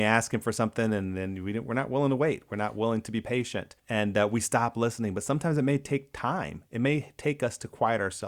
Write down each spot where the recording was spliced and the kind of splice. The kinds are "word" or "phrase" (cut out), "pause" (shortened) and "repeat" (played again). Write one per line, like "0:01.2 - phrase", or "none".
0:03.8 - pause